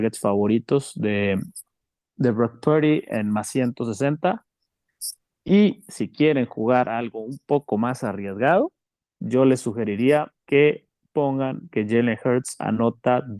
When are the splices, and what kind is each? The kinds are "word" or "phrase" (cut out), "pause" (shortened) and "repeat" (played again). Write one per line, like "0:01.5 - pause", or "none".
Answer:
0:10.4 - pause

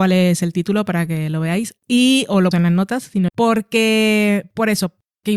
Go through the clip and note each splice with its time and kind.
0:02.5 - word
0:03.3 - word

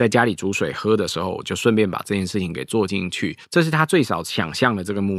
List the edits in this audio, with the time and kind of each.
0:03.4 - pause

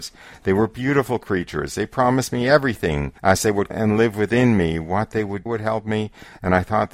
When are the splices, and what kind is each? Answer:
0:03.2 - pause
0:03.7 - word
0:05.5 - phrase

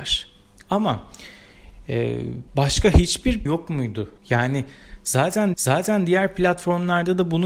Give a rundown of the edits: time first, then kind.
0:02.5 - pause
0:03.5 - word
0:04.2 - pause
0:05.5 - repeat

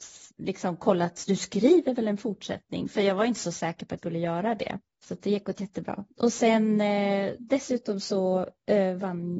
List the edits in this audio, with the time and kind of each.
0:04.0 - word
0:04.9 - pause

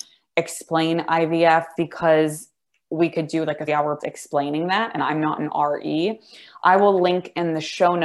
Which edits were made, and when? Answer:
0:01.8 - word
0:03.7 - word
0:04.0 - word
0:05.0 - word

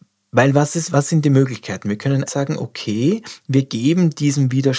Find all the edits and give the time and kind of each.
0:02.3 - word

